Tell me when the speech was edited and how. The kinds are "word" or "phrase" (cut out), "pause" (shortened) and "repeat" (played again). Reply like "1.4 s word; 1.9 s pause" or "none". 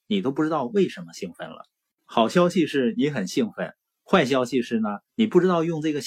5.1 s pause